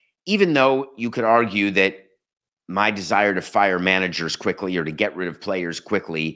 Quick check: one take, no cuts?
yes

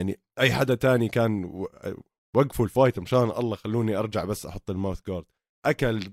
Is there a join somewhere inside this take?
no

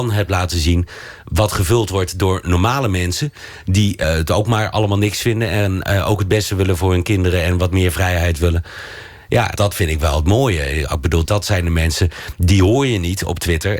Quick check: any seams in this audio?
yes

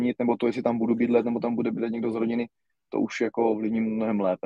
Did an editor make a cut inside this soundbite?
no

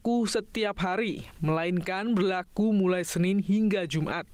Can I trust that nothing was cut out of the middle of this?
yes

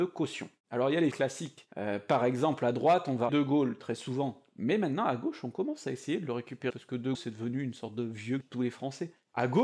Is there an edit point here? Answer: yes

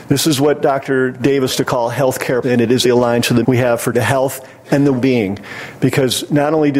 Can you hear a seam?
yes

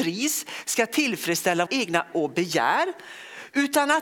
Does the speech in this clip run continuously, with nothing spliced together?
no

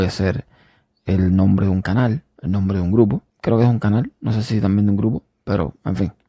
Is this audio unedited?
no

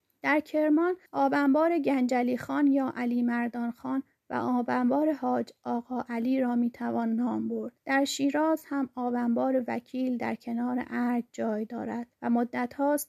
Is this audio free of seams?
no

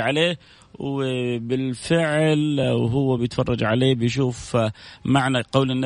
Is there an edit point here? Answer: no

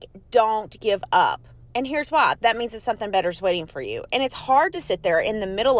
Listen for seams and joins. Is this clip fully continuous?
yes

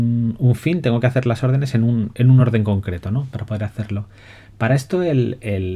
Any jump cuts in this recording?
no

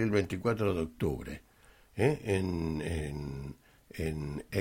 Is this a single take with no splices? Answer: yes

